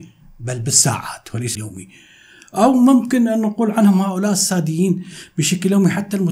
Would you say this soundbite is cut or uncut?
cut